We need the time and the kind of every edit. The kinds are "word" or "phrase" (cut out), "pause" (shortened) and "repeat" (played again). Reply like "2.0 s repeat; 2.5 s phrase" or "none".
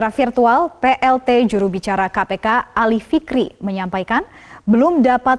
none

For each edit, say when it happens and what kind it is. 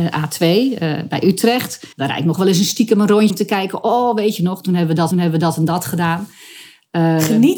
1.9 s pause; 3.3 s word; 5.1 s repeat

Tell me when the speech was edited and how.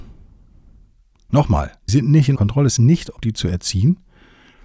1.9 s word; 2.4 s word; 2.8 s word; 3.2 s phrase

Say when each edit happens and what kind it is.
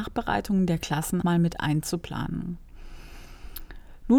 1.2 s word

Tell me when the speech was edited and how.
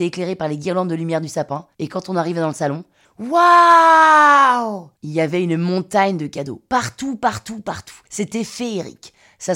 1.7 s pause; 5.0 s pause; 8.1 s pause

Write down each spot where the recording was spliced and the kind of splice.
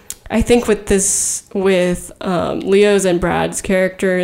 none

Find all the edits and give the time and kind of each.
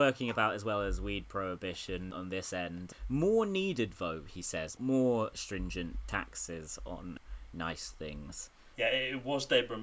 none

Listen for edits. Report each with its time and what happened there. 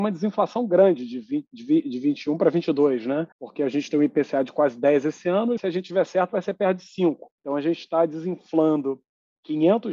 3.3 s pause; 5.6 s word; 7.4 s pause

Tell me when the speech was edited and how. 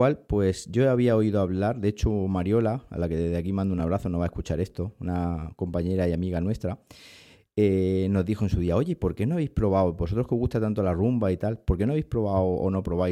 none

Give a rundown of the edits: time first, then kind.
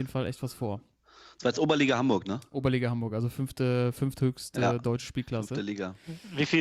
none

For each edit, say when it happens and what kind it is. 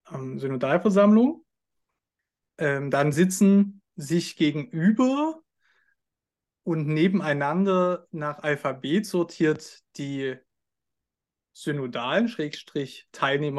none

